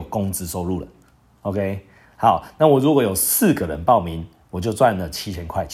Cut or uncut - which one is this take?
uncut